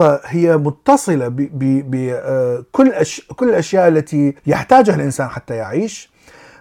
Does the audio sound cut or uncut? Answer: cut